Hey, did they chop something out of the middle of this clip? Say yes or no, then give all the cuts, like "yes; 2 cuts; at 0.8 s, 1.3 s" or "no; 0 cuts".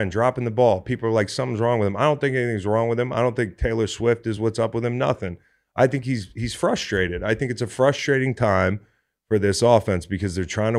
no; 0 cuts